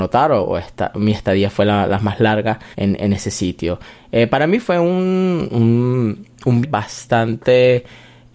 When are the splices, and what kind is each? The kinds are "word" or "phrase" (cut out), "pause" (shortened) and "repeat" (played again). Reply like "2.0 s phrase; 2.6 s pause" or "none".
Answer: 2.7 s pause; 6.6 s word